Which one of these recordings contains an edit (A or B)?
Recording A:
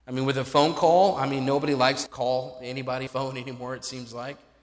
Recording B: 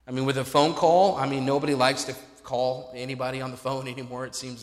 A